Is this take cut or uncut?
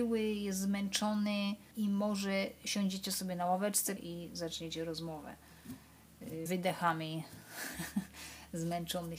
cut